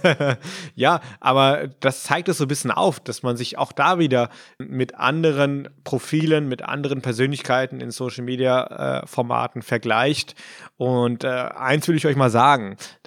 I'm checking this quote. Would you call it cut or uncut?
uncut